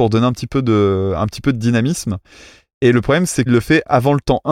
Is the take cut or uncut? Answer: cut